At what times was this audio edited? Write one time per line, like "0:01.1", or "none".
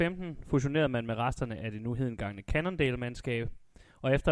none